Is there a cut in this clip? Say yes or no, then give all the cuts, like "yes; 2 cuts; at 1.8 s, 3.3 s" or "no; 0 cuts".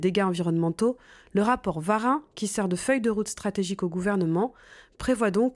no; 0 cuts